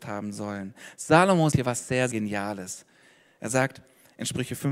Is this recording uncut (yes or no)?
no